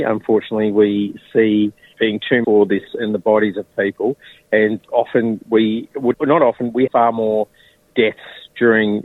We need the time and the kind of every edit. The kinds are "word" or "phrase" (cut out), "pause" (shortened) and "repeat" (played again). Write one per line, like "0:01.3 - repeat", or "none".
0:01.9 - word
0:02.4 - word
0:02.9 - word
0:04.8 - word
0:06.1 - word
0:06.9 - word